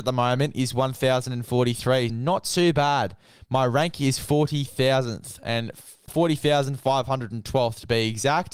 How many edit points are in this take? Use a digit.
2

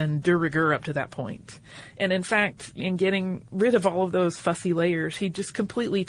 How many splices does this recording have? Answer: 1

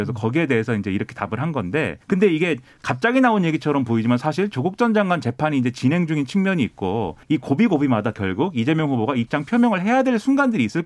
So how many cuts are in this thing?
2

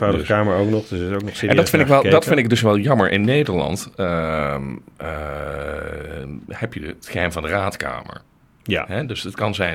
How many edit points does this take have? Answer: 0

